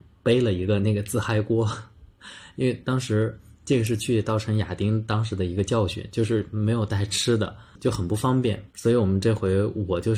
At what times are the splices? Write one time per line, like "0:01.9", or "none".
0:07.8
0:08.7

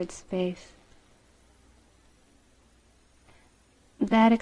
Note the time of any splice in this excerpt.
none

